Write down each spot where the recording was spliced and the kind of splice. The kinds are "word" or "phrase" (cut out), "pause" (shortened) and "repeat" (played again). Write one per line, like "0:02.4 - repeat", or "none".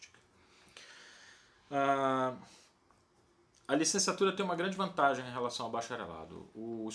none

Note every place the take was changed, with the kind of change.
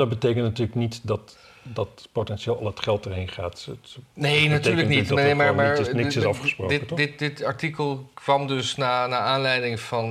none

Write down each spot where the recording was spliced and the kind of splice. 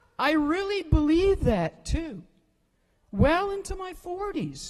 none

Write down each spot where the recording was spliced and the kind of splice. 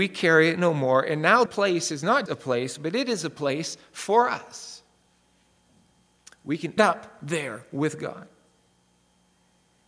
0:01.5 - word
0:02.3 - word
0:06.8 - word

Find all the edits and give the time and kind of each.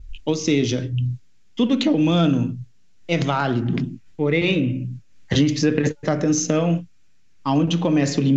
none

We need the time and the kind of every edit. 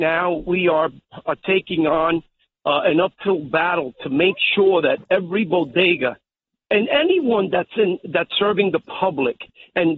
none

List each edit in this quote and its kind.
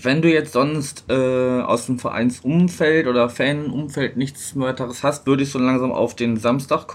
none

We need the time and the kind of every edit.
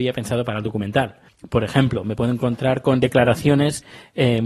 0:01.3 - pause

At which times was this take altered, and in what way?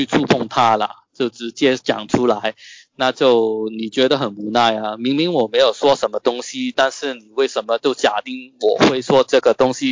none

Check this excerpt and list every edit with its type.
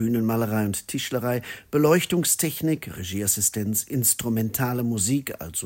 none

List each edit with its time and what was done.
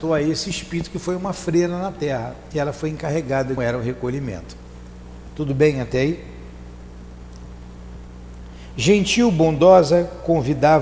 0:03.6 - phrase

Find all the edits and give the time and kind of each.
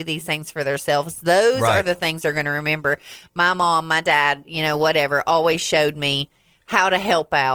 none

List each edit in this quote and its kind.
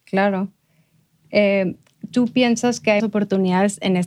0:02.1 - word
0:03.0 - word

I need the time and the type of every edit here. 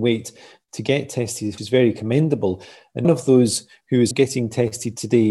0:01.6 - word
0:03.0 - word
0:04.1 - word

